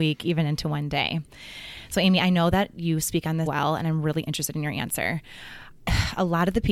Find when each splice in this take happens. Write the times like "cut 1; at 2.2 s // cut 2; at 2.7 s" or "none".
cut 1; at 3.5 s